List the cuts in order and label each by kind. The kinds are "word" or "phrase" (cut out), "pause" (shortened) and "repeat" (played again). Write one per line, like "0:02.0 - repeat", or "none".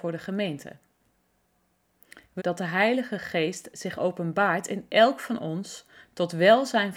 0:02.4 - phrase